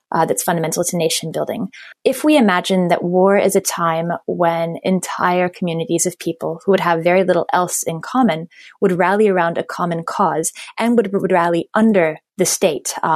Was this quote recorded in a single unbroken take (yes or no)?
yes